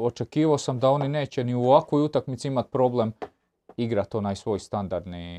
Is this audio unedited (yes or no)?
yes